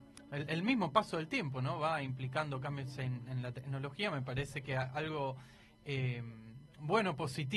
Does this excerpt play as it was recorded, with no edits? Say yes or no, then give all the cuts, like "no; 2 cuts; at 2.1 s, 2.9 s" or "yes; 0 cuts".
yes; 0 cuts